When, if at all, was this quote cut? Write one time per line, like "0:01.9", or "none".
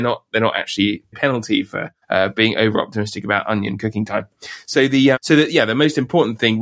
0:01.1
0:02.0
0:05.1